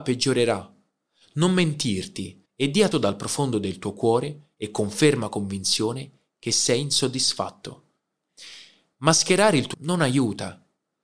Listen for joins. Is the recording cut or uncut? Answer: cut